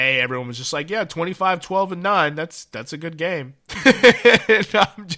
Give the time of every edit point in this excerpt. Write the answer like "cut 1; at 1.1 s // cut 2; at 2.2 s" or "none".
none